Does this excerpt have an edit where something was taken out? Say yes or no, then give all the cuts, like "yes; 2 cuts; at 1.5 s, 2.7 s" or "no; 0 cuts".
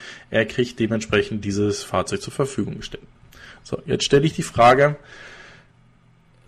no; 0 cuts